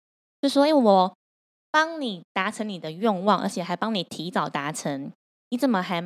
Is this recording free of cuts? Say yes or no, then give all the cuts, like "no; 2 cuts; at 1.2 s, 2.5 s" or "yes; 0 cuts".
yes; 0 cuts